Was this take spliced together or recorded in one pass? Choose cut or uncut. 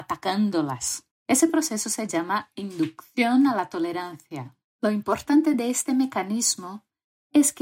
uncut